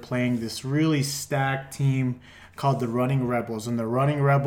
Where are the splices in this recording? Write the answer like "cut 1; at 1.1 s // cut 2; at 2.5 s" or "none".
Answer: none